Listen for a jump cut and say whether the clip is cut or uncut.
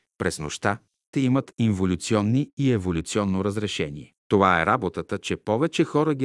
cut